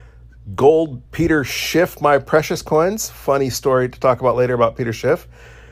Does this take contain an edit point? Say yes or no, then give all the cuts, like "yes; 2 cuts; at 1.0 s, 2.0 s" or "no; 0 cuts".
yes; 1 cut; at 1.1 s